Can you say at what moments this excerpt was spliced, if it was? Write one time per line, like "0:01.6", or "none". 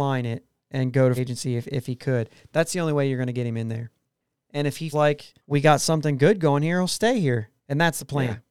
0:01.2
0:04.9
0:05.4
0:07.6